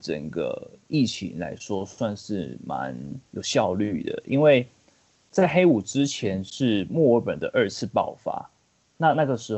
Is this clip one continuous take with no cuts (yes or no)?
no